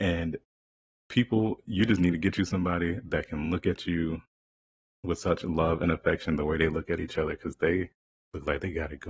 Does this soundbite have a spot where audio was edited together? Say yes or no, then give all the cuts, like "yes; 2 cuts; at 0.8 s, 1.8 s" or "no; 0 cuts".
no; 0 cuts